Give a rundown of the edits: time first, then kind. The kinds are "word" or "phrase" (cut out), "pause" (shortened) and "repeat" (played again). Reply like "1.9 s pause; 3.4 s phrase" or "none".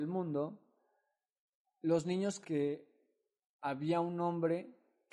2.4 s word

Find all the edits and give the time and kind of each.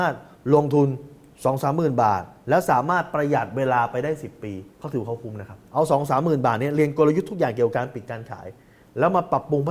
4.7 s pause

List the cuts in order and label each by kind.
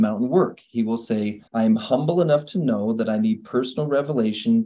1.5 s pause

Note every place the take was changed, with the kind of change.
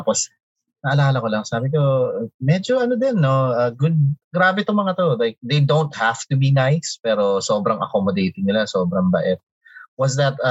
4.2 s pause

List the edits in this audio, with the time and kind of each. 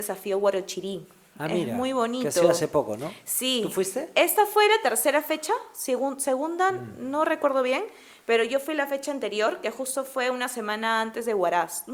none

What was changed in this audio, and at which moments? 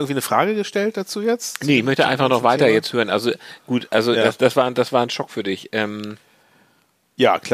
none

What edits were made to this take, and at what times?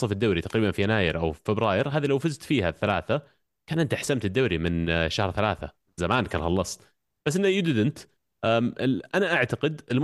none

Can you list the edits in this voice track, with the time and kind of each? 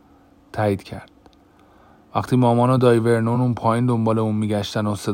none

